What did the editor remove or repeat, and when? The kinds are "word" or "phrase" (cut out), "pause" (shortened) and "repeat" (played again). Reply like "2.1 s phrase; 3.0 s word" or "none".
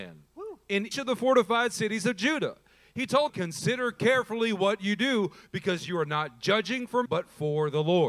0.9 s word; 3.3 s word; 7.1 s word